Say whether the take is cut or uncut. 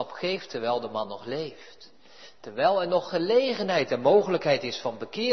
uncut